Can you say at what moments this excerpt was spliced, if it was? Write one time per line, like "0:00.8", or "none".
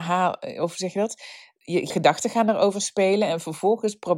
0:01.9